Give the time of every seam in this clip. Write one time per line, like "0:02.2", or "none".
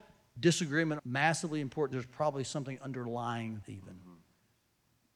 0:01.0
0:01.9
0:03.6

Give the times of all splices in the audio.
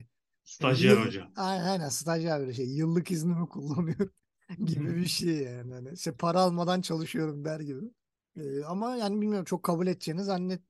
0:04.2
0:08.1

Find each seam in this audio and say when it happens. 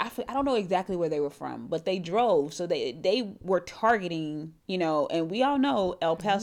0:04.6

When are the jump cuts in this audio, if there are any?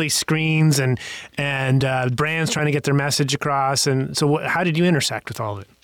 none

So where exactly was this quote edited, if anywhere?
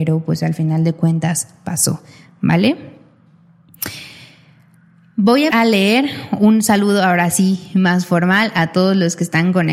0:05.5

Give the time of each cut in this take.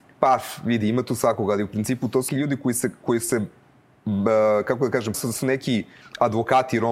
0:02.3
0:03.0
0:05.1

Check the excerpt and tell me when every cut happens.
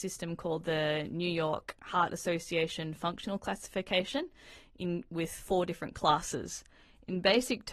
none

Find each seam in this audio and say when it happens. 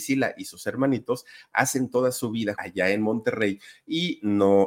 0:02.6

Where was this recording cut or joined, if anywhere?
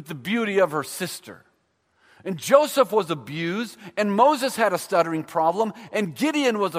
none

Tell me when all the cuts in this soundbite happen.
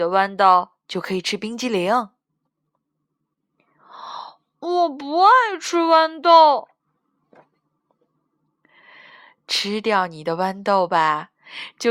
none

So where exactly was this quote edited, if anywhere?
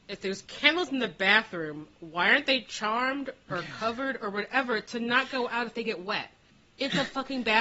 0:06.5

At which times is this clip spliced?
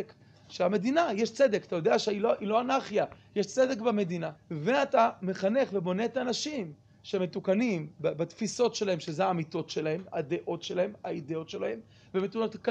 0:04.4

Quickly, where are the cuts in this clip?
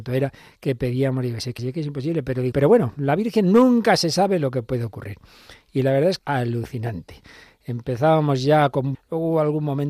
0:01.6
0:02.5
0:06.2
0:08.9

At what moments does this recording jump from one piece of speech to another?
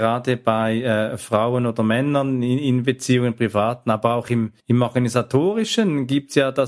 0:04.6

